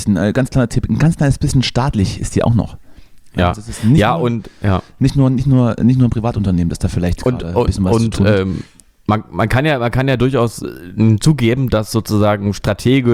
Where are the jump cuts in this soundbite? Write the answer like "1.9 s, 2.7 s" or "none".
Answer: none